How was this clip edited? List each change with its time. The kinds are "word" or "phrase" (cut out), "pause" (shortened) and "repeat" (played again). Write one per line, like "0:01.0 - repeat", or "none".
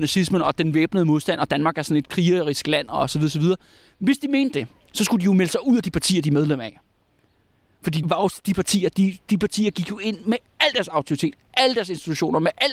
0:08.0 - word